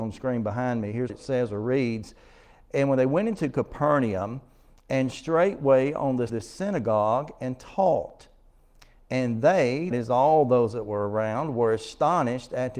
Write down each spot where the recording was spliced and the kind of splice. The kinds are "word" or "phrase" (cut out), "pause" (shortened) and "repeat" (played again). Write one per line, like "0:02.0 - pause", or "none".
0:01.1 - word
0:06.3 - phrase
0:09.9 - word